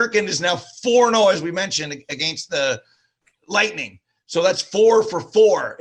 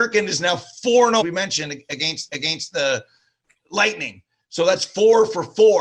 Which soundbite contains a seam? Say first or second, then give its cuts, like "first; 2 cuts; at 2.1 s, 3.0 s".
second; 2 cuts; at 1.2 s, 2.3 s